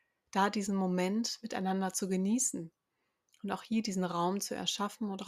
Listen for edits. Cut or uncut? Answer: uncut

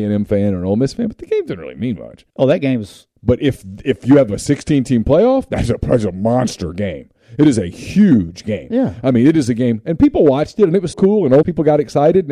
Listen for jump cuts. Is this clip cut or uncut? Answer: cut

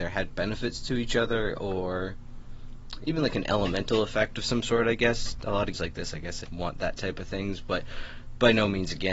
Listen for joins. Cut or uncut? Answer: cut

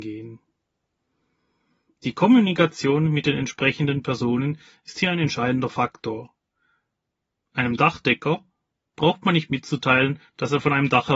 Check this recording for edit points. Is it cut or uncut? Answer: uncut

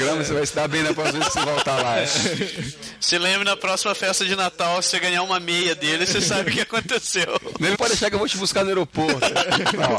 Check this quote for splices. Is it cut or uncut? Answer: cut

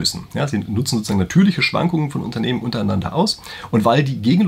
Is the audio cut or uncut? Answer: uncut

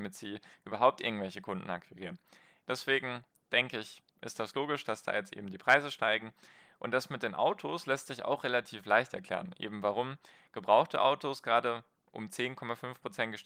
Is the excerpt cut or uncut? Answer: uncut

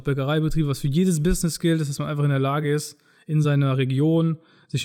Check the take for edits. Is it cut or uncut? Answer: uncut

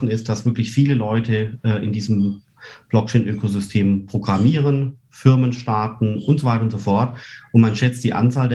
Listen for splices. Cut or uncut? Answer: uncut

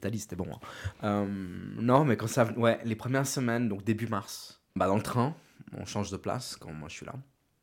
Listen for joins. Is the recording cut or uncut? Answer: cut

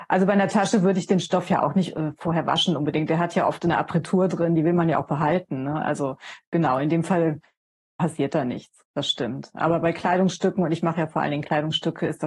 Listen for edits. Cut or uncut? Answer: uncut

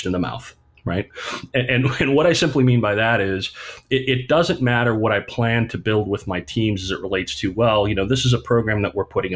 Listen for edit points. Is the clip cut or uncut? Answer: uncut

